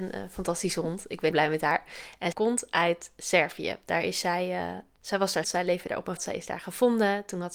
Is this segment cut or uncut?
cut